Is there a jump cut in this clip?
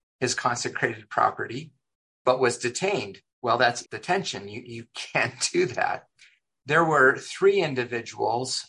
yes; 2 cuts; at 3.3 s, 3.8 s

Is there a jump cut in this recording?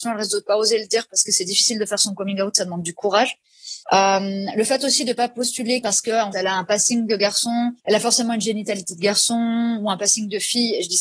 yes; 4 cuts; at 3.8 s, 5.8 s, 6.3 s, 7.8 s

